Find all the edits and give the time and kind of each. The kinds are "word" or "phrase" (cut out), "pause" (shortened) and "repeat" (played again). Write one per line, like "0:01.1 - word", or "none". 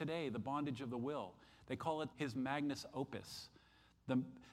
0:02.1 - word